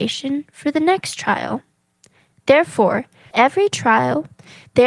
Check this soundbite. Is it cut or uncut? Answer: cut